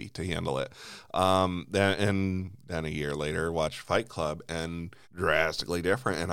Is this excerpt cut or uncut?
cut